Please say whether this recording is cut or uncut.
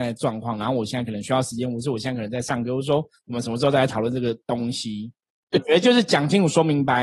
cut